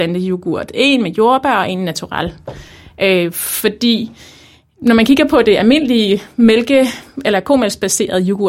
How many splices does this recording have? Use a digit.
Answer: 0